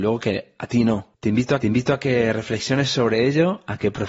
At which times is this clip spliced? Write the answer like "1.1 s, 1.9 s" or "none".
1.1 s, 1.6 s